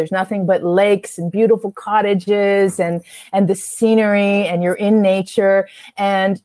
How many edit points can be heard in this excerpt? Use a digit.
0